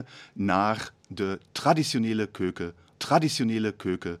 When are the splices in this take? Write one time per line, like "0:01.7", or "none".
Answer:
0:02.9